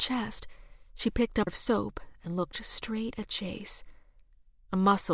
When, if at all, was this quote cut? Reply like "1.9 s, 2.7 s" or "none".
1.5 s